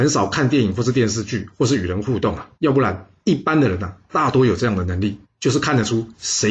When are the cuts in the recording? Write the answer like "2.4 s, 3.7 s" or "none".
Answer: 2.5 s, 3.2 s, 5.2 s